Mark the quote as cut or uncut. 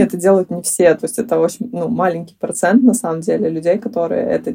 uncut